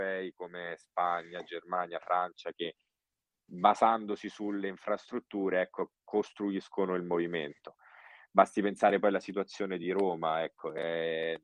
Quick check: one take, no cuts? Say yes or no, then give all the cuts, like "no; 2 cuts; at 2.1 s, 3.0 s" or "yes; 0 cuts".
yes; 0 cuts